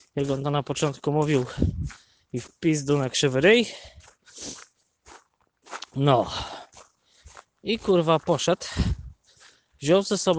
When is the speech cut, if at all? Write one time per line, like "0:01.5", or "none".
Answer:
none